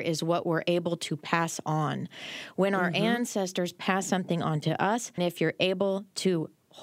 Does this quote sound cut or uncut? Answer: cut